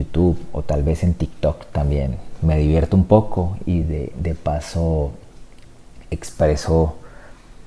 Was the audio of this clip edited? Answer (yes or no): no